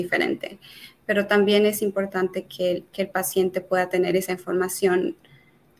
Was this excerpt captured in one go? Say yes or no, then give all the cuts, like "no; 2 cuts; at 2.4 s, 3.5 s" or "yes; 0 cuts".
yes; 0 cuts